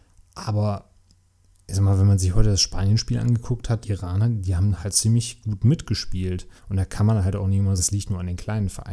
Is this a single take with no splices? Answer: no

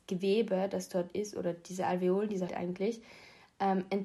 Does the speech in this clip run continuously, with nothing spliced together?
no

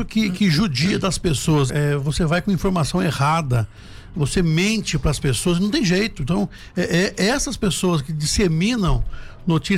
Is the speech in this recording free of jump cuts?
no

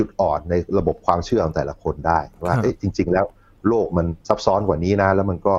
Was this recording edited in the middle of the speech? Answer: yes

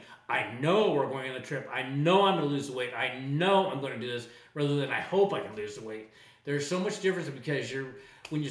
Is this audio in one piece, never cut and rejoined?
yes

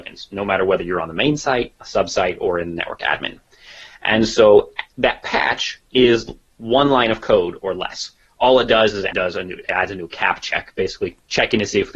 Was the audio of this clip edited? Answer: yes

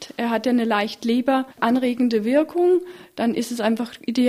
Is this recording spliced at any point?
no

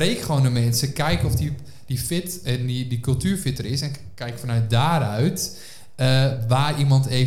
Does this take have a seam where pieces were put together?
no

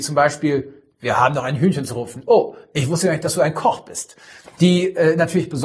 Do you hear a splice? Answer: no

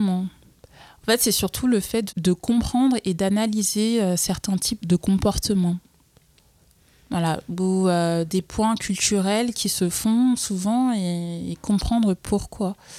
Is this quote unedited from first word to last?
yes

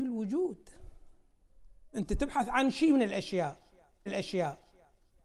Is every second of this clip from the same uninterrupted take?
no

